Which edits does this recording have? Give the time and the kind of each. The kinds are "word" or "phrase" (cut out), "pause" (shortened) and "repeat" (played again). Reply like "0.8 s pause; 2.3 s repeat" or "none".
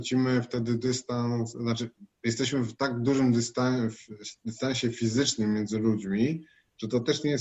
none